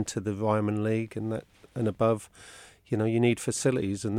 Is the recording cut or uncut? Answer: uncut